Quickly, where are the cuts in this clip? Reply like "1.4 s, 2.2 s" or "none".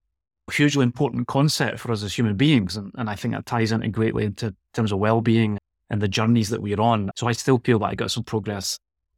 none